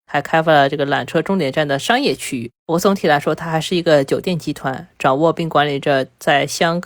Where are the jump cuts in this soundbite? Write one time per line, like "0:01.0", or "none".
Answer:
0:02.6